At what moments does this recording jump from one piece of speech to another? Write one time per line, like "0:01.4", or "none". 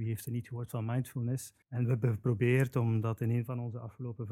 0:01.6